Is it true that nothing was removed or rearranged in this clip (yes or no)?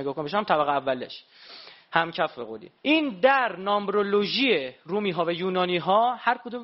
no